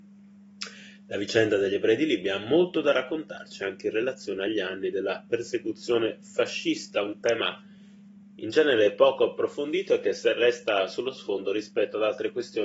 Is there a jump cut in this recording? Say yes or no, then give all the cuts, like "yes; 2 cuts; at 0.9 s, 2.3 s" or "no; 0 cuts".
no; 0 cuts